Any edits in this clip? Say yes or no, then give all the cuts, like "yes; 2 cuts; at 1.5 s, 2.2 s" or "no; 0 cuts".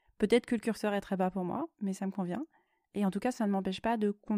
no; 0 cuts